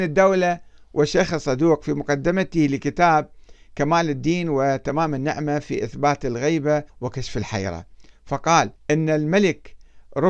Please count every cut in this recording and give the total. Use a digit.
2